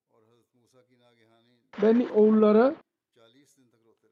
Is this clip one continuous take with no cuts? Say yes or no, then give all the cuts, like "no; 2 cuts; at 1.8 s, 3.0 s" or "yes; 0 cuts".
no; 1 cut; at 2.1 s